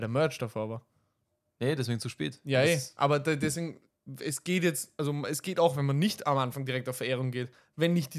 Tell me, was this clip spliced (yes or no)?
no